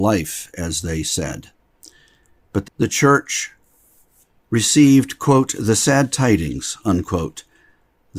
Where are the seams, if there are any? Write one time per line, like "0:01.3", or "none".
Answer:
0:02.6